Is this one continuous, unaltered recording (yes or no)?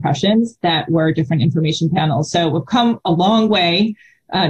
yes